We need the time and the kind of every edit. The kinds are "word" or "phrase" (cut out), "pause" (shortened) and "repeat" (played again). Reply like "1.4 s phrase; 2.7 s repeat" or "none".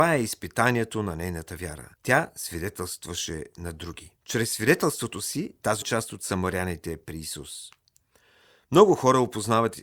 1.9 s pause; 4.2 s pause; 5.8 s phrase